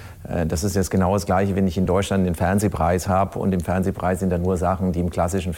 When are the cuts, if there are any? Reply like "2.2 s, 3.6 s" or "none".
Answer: none

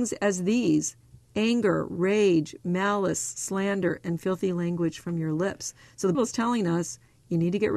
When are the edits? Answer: 6.1 s

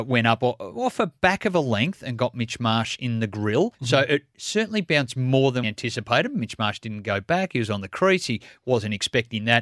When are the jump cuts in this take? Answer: 3.7 s, 5.6 s

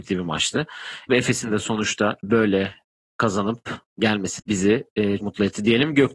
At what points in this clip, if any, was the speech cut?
1.1 s, 2.2 s, 4.4 s, 5.2 s

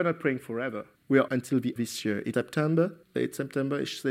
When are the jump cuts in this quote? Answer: 1.0 s, 1.3 s, 1.8 s, 2.3 s, 3.0 s

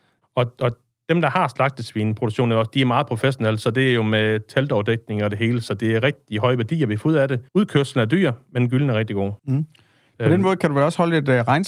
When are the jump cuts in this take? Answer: 7.5 s, 9.4 s

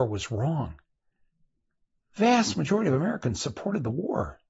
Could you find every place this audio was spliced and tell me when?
none

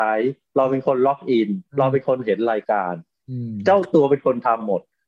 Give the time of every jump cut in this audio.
1.7 s

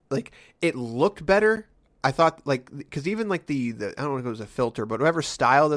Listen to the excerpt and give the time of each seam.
none

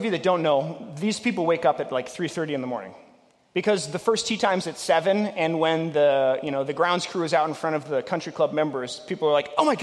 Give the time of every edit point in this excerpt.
none

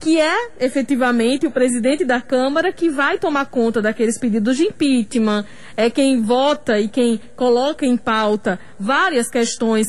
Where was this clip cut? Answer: none

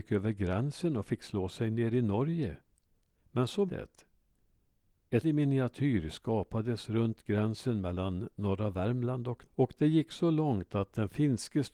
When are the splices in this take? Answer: 3.7 s, 5.2 s, 9.5 s

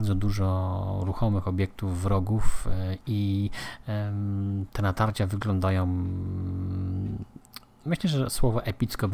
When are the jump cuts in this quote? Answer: none

